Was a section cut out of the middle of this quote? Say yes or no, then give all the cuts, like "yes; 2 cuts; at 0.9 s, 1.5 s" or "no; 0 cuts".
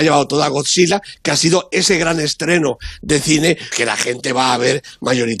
yes; 1 cut; at 3.7 s